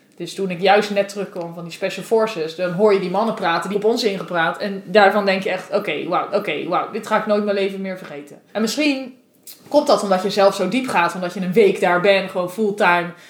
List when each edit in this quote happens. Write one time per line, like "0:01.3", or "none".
0:03.7
0:06.3
0:08.5

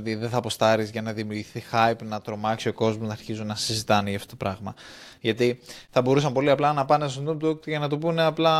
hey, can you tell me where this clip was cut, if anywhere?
none

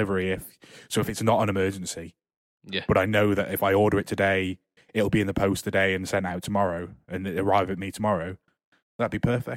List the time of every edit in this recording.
none

